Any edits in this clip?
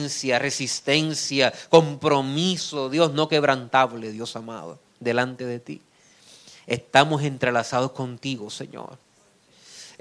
no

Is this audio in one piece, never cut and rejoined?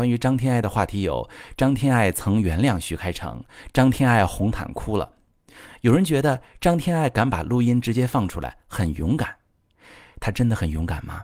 yes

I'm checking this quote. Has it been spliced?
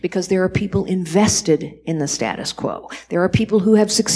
no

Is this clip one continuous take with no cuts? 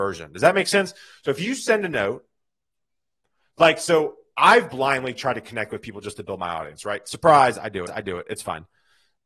no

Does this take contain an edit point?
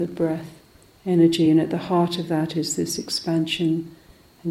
no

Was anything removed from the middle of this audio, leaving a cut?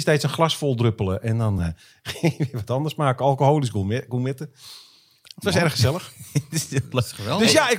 no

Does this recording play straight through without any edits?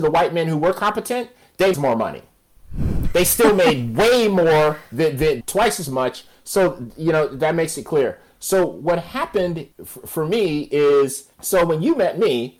no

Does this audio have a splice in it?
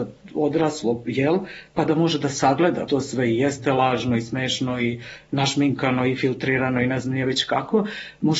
yes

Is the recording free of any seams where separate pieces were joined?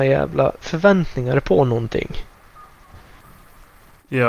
yes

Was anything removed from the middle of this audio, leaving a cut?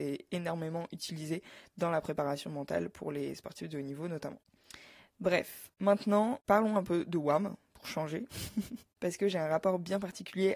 no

